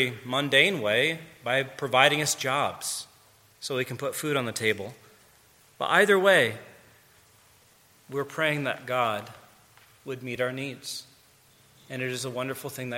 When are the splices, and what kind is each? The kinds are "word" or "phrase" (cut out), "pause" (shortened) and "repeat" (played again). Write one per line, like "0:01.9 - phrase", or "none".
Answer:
none